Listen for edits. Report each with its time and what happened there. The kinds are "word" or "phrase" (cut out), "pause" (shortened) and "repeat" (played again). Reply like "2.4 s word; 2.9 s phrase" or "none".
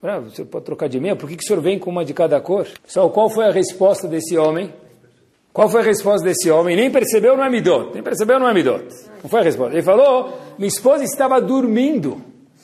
2.7 s pause